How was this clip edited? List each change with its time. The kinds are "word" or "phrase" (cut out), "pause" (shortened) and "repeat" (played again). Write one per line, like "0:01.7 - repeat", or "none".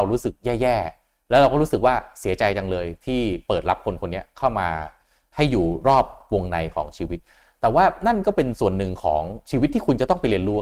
none